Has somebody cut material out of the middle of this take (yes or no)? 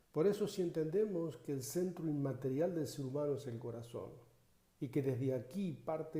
no